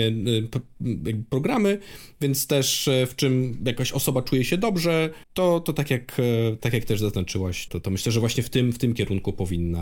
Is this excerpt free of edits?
no; 3 cuts; at 5.2 s, 6.6 s, 7.7 s

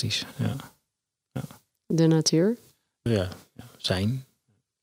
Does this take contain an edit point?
yes; 1 cut; at 3.1 s

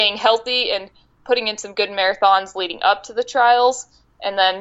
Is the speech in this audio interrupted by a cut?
no; 0 cuts

